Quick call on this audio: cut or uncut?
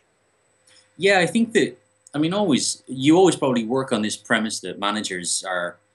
uncut